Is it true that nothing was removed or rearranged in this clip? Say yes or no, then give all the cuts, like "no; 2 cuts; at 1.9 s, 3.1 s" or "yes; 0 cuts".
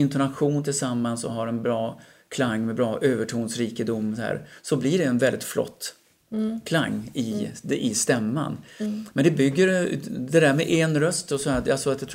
yes; 0 cuts